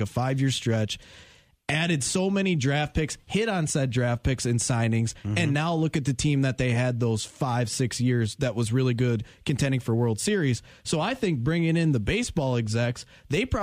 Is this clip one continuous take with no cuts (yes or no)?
yes